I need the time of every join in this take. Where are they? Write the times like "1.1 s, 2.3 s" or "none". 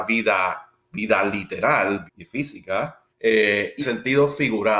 2.1 s, 3.1 s, 3.8 s